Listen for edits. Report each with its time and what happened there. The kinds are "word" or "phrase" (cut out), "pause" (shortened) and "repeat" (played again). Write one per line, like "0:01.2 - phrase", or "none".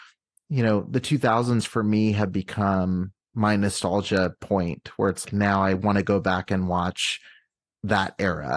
0:03.2 - pause
0:05.2 - word